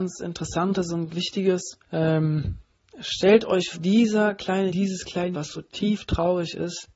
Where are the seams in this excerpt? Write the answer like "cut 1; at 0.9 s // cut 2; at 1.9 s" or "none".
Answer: cut 1; at 1.1 s // cut 2; at 1.8 s // cut 3; at 3.7 s // cut 4; at 4.7 s // cut 5; at 5.3 s

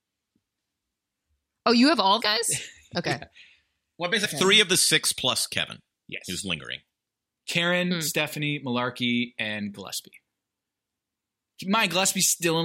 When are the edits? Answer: cut 1; at 2.2 s // cut 2; at 4.2 s

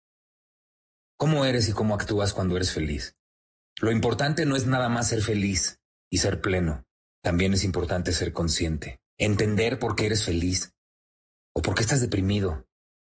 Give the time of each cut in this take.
cut 1; at 3.5 s // cut 2; at 7.0 s // cut 3; at 9.1 s

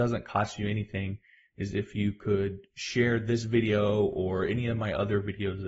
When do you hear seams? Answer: none

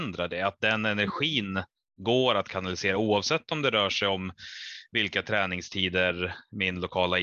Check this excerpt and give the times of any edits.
none

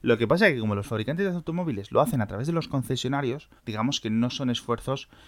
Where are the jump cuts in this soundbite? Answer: cut 1; at 3.6 s

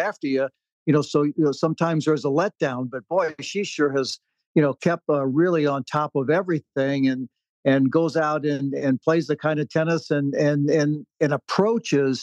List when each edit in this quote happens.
none

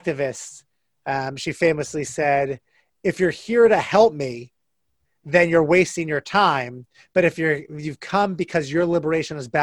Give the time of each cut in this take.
none

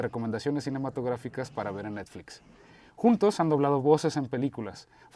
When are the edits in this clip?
none

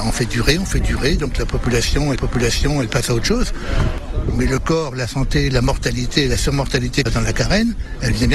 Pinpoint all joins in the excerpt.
cut 1; at 2.2 s // cut 2; at 7.1 s

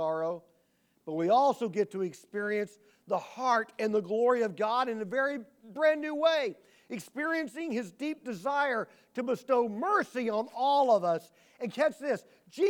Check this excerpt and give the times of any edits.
none

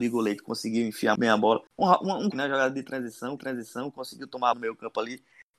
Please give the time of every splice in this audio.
cut 1; at 1.2 s // cut 2; at 1.7 s // cut 3; at 2.3 s // cut 4; at 3.4 s // cut 5; at 4.5 s

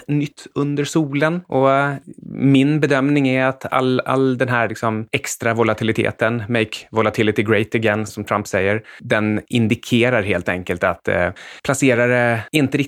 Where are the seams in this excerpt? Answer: cut 1; at 8.1 s

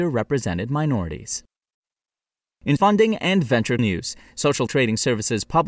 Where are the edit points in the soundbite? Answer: cut 1; at 2.8 s // cut 2; at 3.8 s // cut 3; at 4.7 s

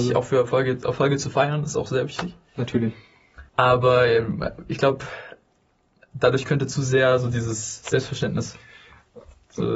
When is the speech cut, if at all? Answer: cut 1; at 3.5 s

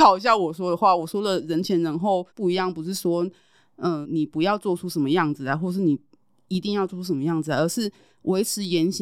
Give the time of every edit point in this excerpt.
cut 1; at 2.3 s // cut 2; at 4.0 s

